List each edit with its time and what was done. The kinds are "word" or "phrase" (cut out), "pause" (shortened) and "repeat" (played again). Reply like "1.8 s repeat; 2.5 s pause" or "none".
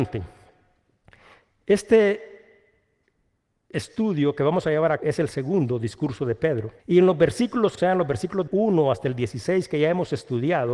5.0 s word; 6.8 s pause; 7.8 s phrase; 8.5 s word